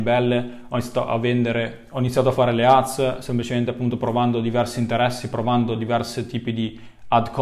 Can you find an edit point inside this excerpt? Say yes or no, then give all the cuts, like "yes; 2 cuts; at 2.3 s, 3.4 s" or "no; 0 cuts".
no; 0 cuts